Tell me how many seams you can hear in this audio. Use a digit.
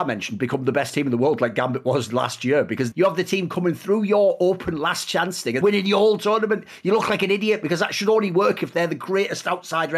2